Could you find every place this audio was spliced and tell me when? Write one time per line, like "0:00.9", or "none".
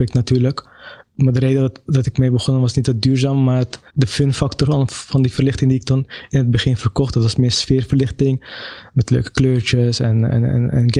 0:03.9